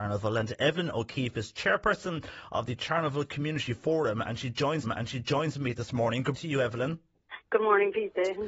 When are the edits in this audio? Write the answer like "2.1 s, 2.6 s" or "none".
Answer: 4.8 s, 6.3 s